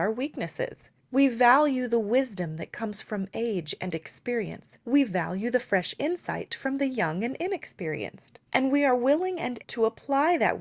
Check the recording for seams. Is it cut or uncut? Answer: cut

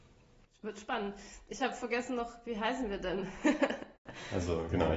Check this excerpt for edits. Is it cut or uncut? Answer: uncut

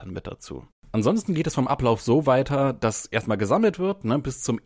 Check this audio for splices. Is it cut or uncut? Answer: uncut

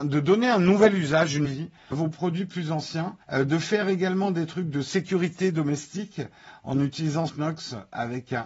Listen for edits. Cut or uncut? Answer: cut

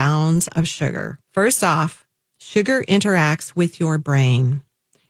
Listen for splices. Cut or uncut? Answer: cut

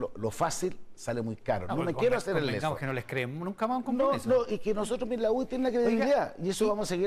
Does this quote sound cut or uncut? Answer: uncut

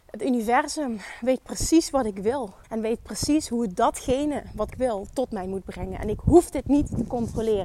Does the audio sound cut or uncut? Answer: cut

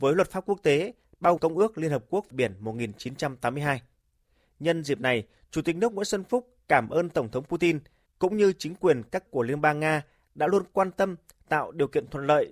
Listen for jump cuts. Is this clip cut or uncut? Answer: cut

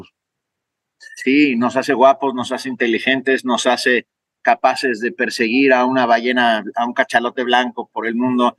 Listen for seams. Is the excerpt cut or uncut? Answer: uncut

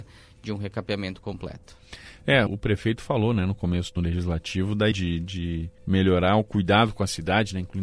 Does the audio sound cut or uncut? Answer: cut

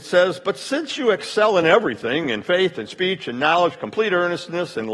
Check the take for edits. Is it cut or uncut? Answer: uncut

